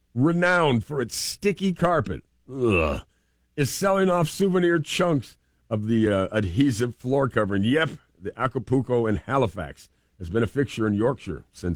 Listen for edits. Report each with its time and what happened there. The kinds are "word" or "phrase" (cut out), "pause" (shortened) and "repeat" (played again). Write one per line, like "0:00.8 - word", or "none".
none